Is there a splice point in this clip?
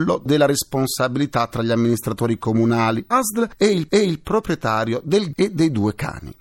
yes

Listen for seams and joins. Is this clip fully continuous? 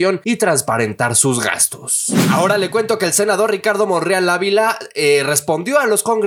yes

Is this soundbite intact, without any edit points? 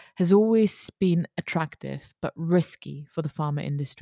yes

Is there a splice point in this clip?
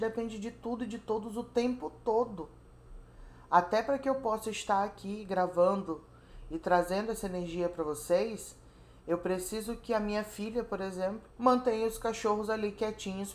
yes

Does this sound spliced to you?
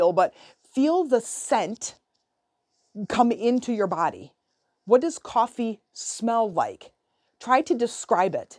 no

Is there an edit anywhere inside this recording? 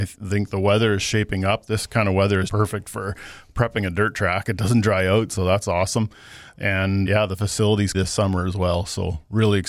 yes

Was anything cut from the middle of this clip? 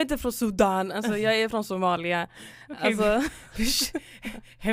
no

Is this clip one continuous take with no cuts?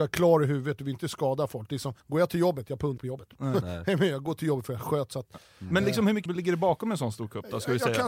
no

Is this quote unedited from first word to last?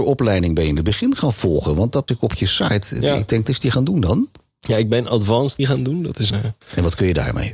no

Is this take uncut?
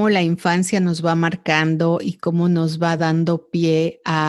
yes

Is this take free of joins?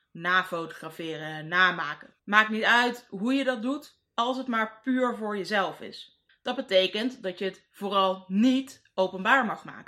no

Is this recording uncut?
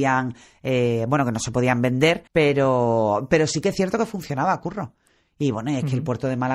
no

